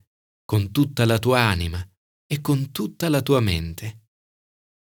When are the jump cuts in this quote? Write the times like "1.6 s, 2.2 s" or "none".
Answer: none